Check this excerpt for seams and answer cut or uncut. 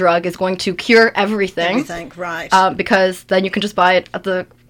uncut